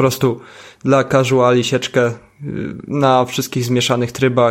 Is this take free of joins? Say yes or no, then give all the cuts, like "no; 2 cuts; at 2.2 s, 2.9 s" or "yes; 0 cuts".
yes; 0 cuts